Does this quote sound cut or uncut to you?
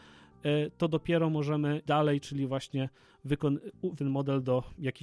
cut